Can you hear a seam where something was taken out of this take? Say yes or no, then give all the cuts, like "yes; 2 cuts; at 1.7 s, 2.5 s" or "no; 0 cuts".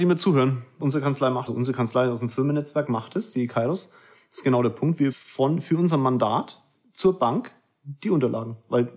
yes; 2 cuts; at 1.5 s, 5.1 s